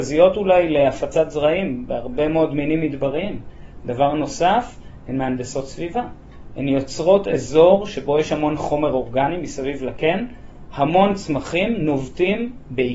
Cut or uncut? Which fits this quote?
uncut